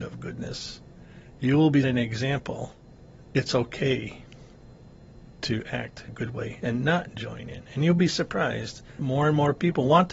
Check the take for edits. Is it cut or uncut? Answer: cut